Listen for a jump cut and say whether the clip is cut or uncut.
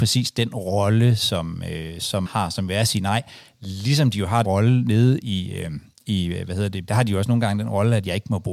cut